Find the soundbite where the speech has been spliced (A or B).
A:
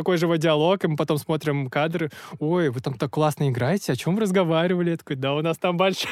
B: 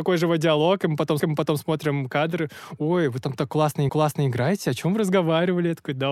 B